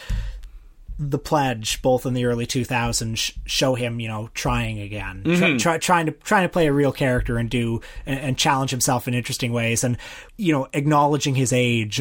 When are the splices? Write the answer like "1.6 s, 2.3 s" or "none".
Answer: 10.3 s